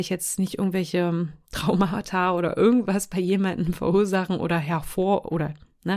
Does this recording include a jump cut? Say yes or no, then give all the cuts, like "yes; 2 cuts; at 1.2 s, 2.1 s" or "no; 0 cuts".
no; 0 cuts